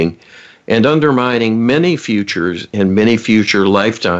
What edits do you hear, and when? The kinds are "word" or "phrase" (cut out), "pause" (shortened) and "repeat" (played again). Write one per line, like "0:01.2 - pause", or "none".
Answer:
none